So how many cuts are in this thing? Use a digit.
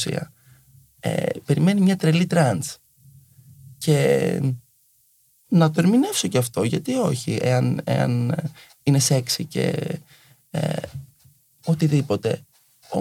0